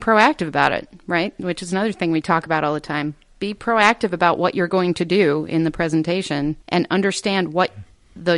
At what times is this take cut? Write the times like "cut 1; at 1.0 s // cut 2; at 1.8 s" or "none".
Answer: cut 1; at 6.6 s